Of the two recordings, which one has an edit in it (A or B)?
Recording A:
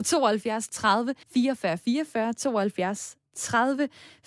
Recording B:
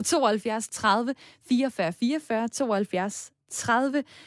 A